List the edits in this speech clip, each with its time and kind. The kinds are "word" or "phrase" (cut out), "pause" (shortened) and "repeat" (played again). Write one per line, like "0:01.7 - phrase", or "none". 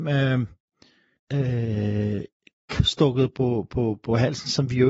0:01.2 - word
0:02.8 - word